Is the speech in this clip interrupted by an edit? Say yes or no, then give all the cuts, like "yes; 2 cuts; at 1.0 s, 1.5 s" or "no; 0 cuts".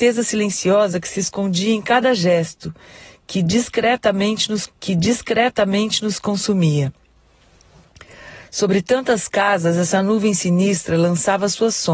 yes; 1 cut; at 4.7 s